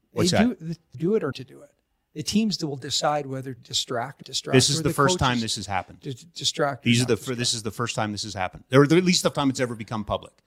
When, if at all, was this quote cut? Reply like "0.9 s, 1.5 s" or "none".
0.9 s, 1.3 s, 3.6 s, 4.2 s, 9.3 s